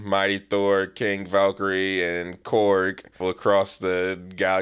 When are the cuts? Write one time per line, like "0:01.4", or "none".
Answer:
0:03.2

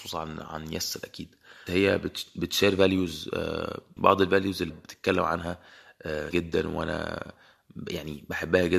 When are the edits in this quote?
0:01.7
0:04.0
0:04.7
0:06.3

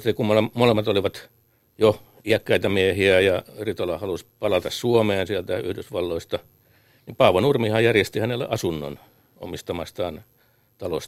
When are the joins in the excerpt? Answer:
0:04.3

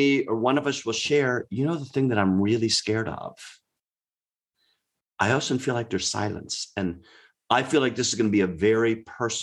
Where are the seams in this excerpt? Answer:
none

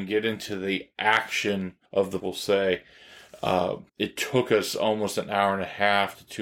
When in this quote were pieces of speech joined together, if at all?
0:01.8
0:02.2
0:03.9

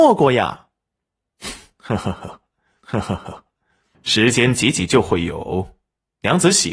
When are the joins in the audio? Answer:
0:02.8

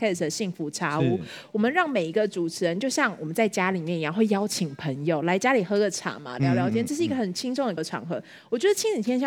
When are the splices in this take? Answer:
0:07.8

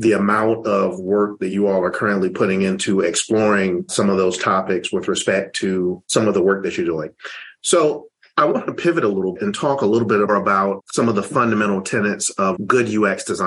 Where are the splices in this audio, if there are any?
0:09.4
0:10.3
0:12.6

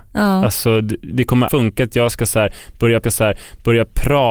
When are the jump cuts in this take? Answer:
0:01.5
0:03.0

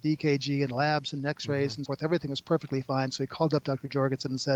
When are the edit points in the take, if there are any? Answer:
0:01.9

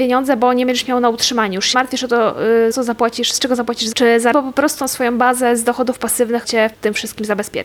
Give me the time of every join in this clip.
0:01.7
0:02.7
0:03.9
0:04.3
0:04.8
0:06.4
0:06.7

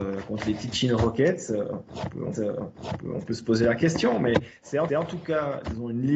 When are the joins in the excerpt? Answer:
0:02.3
0:04.9

